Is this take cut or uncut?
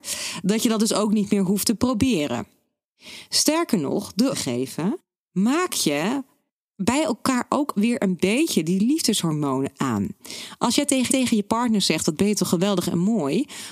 cut